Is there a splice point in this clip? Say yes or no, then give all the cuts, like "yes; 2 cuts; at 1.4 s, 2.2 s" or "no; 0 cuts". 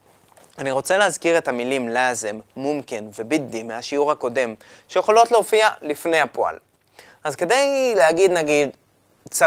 no; 0 cuts